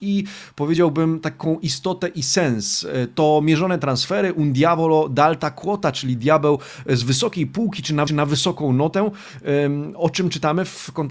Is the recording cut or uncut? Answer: cut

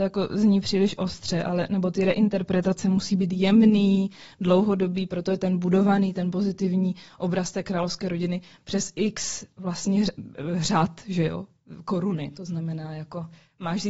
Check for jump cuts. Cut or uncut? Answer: uncut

